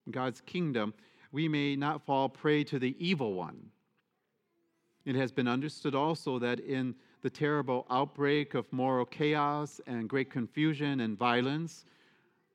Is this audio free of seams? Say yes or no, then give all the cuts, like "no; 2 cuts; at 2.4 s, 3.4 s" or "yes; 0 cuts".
yes; 0 cuts